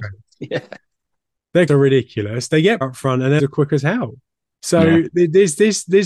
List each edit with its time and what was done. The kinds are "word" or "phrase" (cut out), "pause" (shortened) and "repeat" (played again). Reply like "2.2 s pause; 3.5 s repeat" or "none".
1.7 s word; 2.8 s word; 3.4 s word